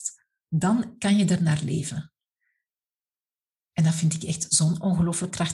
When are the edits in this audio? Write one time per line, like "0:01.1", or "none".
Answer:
none

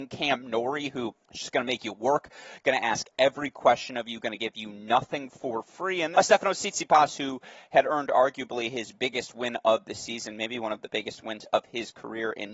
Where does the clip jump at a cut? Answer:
0:01.2
0:06.1

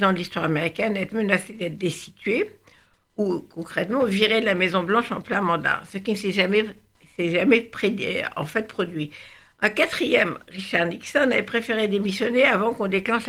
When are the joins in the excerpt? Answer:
none

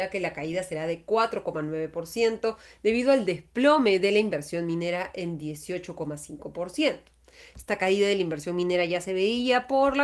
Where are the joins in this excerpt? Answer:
none

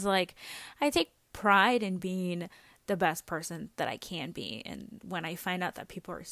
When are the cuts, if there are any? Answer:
none

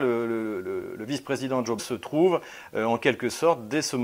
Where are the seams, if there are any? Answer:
0:01.8

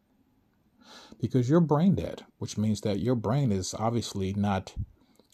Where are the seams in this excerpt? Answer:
0:02.3

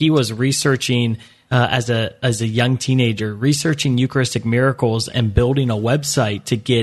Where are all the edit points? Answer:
none

